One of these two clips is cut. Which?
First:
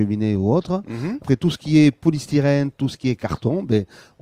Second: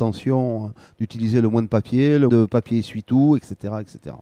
second; 1 cut; at 2.3 s

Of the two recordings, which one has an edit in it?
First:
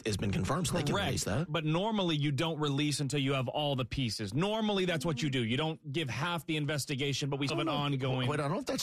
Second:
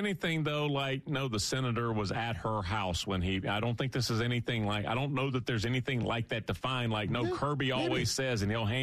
first; 1 cut; at 7.5 s

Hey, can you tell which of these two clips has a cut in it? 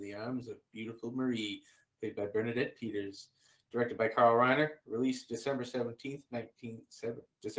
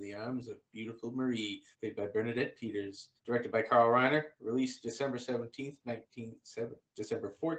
second; 2 cuts; at 1.7 s, 3.2 s

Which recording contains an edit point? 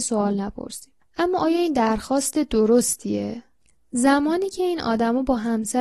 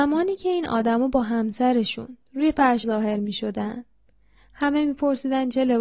second; 1 cut; at 2.8 s

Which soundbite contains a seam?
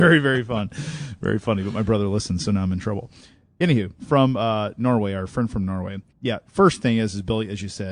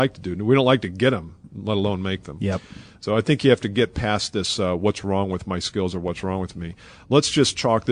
first; 2 cuts; at 4.0 s, 6.1 s

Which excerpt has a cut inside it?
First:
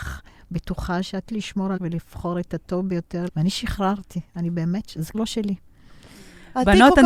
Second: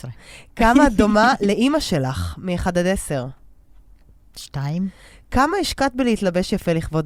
first; 4 cuts; at 1.3 s, 1.8 s, 3.3 s, 5.1 s

